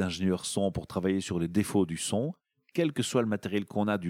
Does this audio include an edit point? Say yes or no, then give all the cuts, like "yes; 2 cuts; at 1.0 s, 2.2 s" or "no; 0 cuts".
no; 0 cuts